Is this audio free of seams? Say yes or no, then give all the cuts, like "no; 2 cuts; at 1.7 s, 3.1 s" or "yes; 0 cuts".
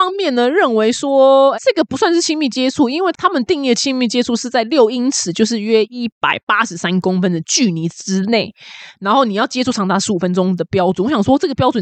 no; 1 cut; at 1.5 s